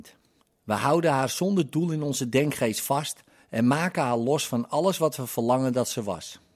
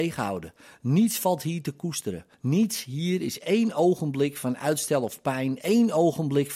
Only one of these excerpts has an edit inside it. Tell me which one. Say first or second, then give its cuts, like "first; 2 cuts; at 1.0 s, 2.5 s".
second; 1 cut; at 2.3 s